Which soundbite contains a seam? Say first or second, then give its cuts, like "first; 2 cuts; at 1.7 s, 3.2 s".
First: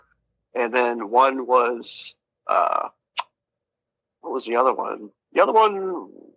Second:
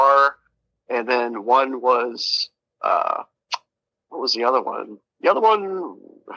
second; 1 cut; at 3.7 s